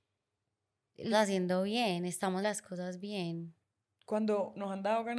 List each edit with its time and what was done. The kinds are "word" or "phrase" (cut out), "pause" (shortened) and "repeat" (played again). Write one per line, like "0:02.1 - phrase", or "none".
0:01.1 - word
0:02.4 - word